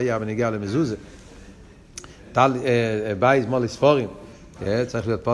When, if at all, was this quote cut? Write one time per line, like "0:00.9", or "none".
none

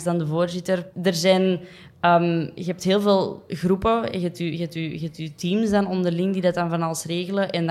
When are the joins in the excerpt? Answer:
0:00.9

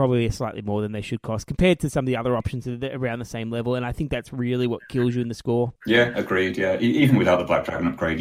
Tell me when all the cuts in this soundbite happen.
0:05.8

